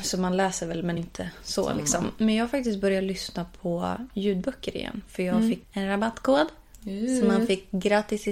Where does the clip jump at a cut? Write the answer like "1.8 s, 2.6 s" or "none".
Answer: 1.0 s, 5.6 s